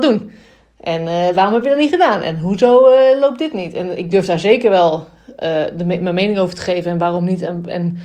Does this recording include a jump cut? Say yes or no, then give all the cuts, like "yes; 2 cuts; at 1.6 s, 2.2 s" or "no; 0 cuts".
yes; 1 cut; at 4.1 s